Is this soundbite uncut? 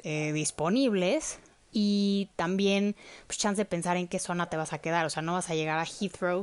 yes; 0 cuts

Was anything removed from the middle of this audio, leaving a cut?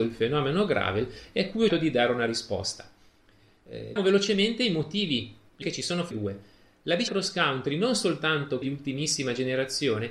yes; 6 cuts; at 1.7 s, 4.0 s, 5.6 s, 6.1 s, 7.1 s, 8.6 s

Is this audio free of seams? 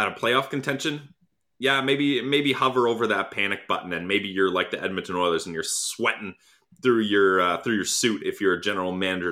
yes; 0 cuts

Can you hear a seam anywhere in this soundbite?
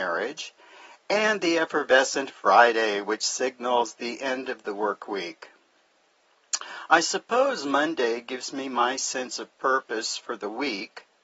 no; 0 cuts

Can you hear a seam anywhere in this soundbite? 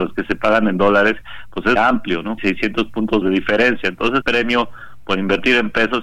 yes; 4 cuts; at 1.8 s, 2.4 s, 3.2 s, 4.2 s

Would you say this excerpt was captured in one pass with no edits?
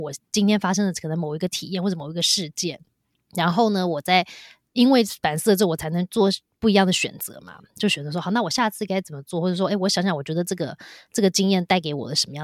yes; 0 cuts

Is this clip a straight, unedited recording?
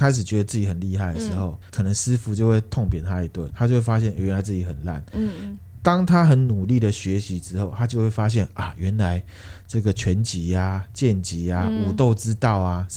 no; 2 cuts; at 1.6 s, 3.5 s

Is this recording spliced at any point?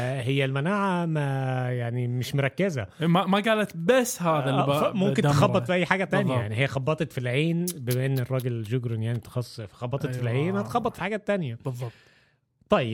no; 0 cuts

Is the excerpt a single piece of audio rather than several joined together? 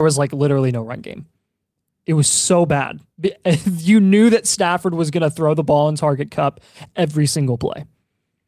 yes; 0 cuts

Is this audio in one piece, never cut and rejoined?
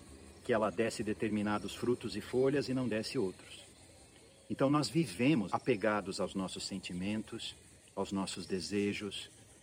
no; 1 cut; at 5.5 s

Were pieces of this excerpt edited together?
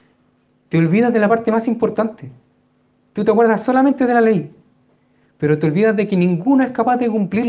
no; 0 cuts

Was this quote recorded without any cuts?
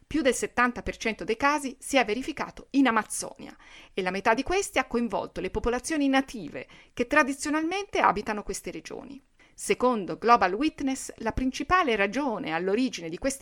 yes; 0 cuts

